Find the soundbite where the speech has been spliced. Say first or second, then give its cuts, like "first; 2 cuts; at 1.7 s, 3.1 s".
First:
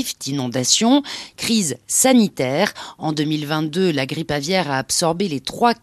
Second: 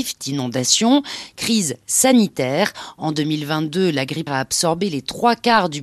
second; 1 cut; at 4.3 s